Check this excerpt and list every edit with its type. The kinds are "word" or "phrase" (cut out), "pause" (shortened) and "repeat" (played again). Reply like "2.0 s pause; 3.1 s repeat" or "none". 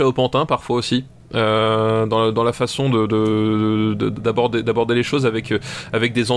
none